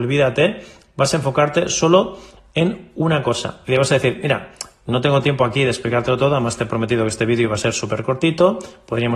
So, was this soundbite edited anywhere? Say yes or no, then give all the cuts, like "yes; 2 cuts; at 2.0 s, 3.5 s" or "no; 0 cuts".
no; 0 cuts